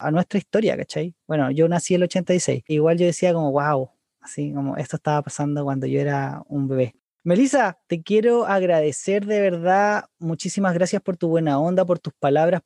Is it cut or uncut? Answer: cut